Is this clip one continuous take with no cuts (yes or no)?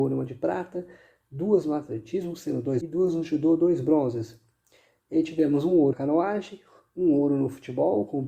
no